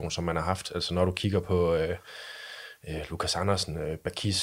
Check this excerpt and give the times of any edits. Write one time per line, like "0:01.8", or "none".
none